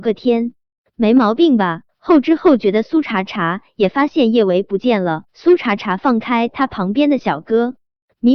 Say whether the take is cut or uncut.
cut